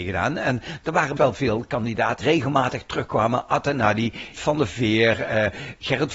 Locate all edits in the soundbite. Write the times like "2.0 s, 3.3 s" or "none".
1.2 s, 2.2 s, 4.3 s